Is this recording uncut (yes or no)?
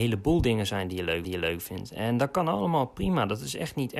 no